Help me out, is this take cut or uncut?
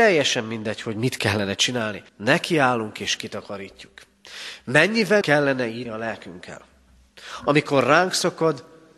cut